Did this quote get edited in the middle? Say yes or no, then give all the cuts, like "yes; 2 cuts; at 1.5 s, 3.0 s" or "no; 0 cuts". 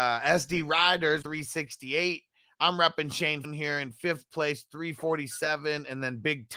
yes; 2 cuts; at 1.2 s, 3.4 s